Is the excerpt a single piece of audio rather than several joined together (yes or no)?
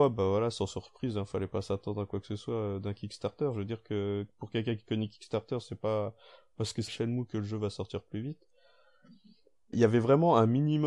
no